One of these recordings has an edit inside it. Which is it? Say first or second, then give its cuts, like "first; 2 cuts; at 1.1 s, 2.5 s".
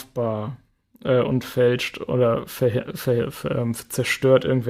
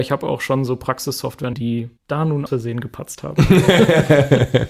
second; 3 cuts; at 1.5 s, 2.0 s, 2.5 s